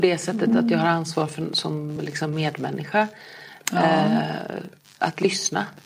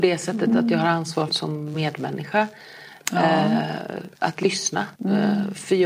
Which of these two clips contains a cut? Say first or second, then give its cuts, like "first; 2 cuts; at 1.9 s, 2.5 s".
second; 4 cuts; at 1.3 s, 1.7 s, 4.1 s, 4.9 s